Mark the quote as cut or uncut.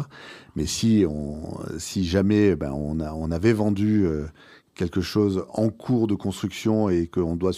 uncut